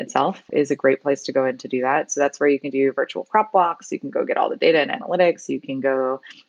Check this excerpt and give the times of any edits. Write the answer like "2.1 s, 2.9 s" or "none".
none